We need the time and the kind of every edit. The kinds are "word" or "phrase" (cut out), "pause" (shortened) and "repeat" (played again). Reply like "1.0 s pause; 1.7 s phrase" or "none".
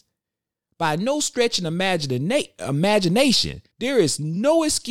3.7 s pause